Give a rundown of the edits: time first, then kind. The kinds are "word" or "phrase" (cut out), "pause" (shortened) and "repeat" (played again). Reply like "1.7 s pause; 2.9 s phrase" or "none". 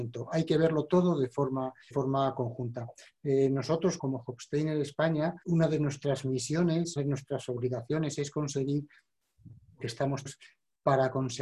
1.9 s word; 4.0 s word; 5.4 s word; 7.0 s word; 9.8 s word; 10.3 s word